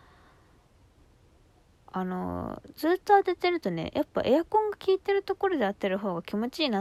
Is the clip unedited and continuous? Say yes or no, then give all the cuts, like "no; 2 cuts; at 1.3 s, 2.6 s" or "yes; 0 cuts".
yes; 0 cuts